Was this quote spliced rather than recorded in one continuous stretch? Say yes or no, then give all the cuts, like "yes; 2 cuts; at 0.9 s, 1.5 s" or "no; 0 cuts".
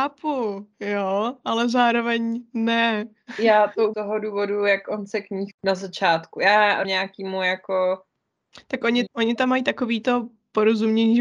yes; 4 cuts; at 3.9 s, 5.5 s, 6.8 s, 9.1 s